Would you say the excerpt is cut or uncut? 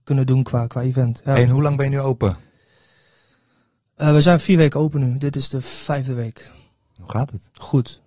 uncut